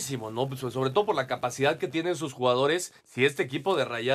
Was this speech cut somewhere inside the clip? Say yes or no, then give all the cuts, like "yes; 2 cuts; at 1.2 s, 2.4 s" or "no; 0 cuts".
yes; 1 cut; at 3.0 s